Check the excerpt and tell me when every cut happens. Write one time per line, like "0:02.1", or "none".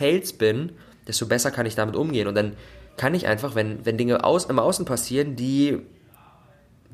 0:02.9